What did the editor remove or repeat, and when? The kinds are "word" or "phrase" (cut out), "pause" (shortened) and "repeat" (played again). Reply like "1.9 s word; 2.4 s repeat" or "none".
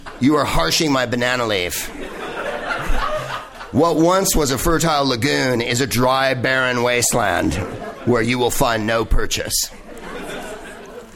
none